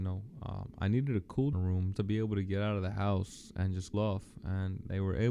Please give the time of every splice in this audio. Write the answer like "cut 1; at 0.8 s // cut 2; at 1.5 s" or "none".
cut 1; at 1.5 s // cut 2; at 1.9 s // cut 3; at 3.9 s